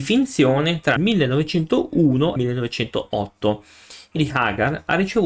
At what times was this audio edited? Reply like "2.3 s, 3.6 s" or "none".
1.0 s, 2.4 s, 4.2 s